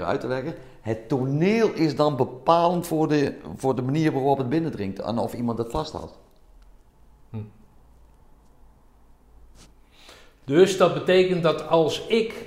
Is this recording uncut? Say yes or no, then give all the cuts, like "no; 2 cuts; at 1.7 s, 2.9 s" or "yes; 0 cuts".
yes; 0 cuts